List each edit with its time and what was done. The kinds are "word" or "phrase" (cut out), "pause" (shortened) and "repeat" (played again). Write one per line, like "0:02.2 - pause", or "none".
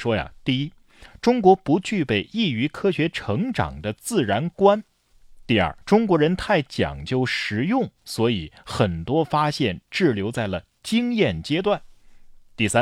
0:05.8 - pause